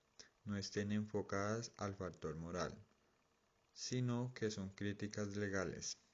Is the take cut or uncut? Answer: uncut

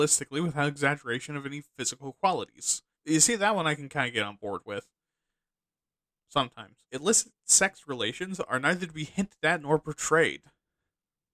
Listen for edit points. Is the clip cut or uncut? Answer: cut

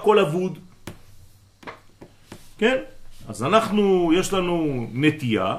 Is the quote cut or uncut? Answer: uncut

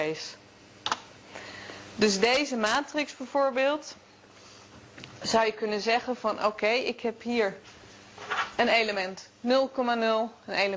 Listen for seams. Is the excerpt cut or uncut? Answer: uncut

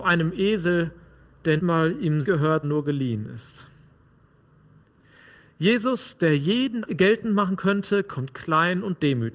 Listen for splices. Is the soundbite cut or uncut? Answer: cut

